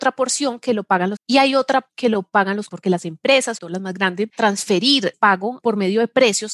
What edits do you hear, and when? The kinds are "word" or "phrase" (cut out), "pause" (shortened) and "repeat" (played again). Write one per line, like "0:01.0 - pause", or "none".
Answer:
0:01.2 - word
0:01.9 - word
0:02.7 - word
0:03.6 - word
0:04.3 - word
0:05.1 - word